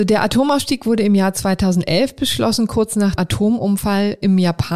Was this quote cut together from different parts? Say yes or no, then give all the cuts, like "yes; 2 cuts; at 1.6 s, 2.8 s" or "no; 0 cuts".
yes; 1 cut; at 3.2 s